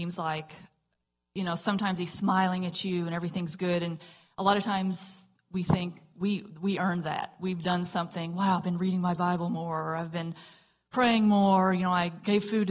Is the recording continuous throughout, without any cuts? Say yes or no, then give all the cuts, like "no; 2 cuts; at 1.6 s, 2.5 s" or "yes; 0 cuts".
yes; 0 cuts